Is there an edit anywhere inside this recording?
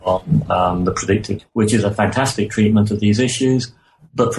yes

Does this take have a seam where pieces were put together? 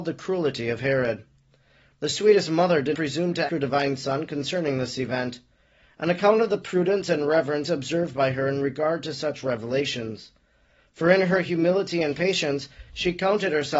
yes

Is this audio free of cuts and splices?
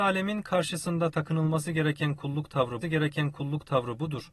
no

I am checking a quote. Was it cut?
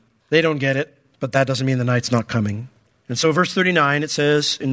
no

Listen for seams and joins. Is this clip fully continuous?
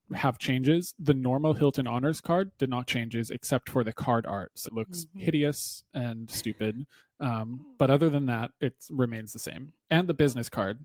no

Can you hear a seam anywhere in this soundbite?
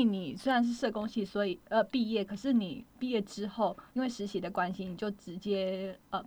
yes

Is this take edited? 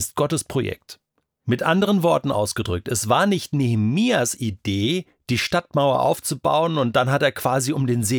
no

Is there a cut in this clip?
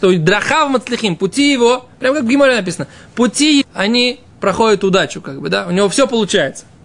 yes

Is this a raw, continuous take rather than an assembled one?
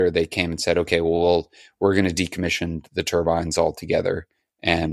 yes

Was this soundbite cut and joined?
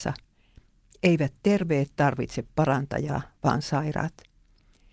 no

